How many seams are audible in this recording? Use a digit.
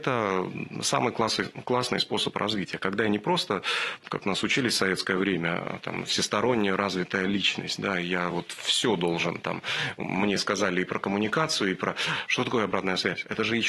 0